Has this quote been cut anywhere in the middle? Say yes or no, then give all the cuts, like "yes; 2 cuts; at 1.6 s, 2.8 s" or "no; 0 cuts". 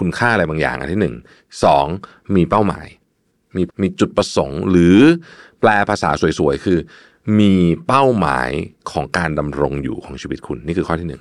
yes; 1 cut; at 3.7 s